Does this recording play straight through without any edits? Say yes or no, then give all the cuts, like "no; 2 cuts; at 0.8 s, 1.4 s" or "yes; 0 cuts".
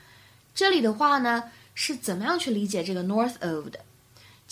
yes; 0 cuts